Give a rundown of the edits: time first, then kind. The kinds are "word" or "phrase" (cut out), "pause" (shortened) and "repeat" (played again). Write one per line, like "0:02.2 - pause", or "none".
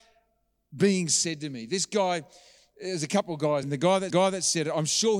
0:03.6 - word
0:04.1 - repeat